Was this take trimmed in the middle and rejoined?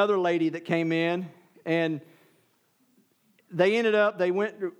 no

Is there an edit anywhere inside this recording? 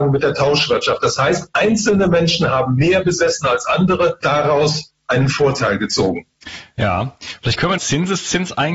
yes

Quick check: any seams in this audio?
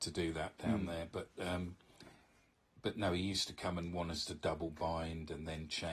no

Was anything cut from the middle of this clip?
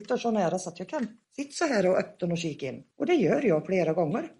yes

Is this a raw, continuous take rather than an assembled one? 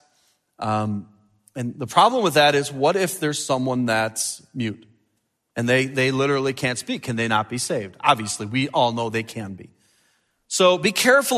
yes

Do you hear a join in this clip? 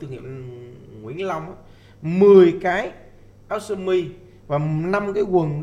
no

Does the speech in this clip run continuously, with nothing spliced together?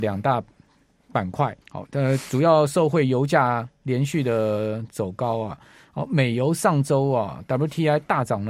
no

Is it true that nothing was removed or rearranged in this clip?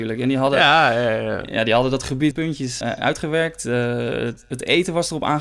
no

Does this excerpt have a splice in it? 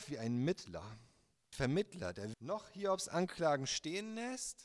yes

